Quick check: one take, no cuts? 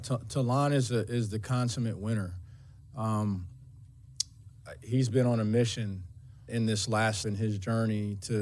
no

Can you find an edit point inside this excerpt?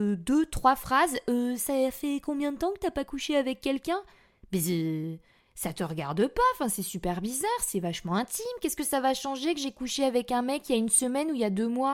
no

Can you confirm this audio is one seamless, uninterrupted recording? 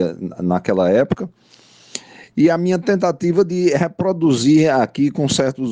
yes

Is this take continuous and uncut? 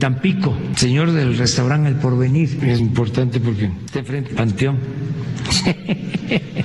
no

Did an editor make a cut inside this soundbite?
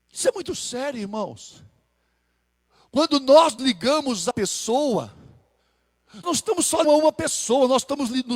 yes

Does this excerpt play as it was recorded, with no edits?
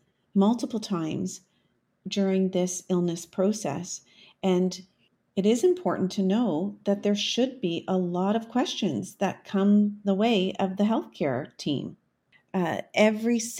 yes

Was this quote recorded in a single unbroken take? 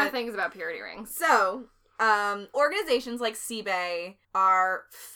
no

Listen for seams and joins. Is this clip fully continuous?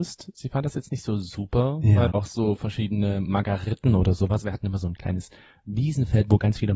no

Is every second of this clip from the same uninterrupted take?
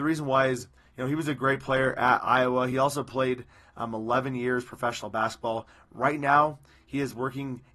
yes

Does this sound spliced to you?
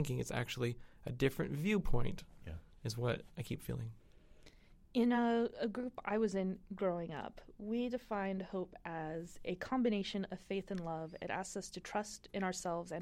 no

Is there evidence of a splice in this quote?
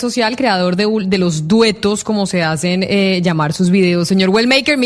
no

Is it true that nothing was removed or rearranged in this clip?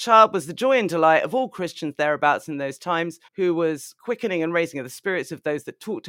no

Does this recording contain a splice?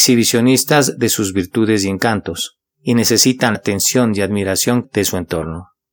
yes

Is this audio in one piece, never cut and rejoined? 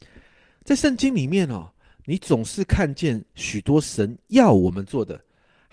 yes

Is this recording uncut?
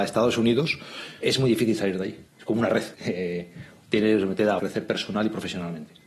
no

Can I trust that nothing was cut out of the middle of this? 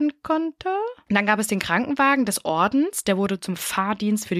yes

